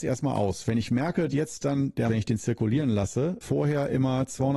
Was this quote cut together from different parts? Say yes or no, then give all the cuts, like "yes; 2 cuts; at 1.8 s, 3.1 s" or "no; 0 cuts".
yes; 3 cuts; at 1.3 s, 2.1 s, 3.4 s